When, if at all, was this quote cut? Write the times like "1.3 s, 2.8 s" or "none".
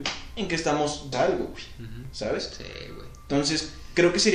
1.1 s